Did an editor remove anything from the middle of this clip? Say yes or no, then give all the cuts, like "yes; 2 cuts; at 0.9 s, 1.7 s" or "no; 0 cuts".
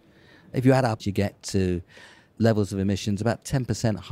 yes; 1 cut; at 1.0 s